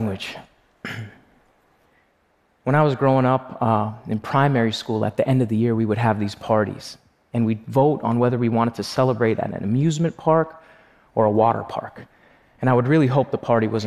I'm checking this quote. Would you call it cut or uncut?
uncut